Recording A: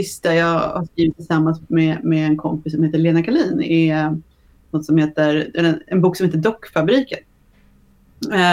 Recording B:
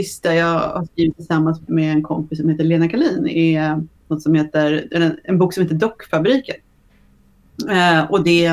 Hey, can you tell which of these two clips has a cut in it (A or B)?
B